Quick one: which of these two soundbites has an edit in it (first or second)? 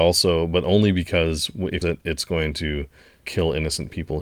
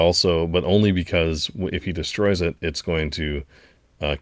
first